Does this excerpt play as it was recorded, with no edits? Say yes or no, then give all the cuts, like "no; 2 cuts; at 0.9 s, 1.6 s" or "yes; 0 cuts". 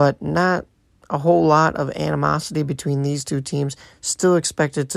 yes; 0 cuts